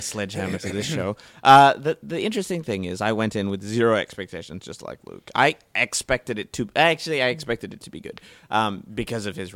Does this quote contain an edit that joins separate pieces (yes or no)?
no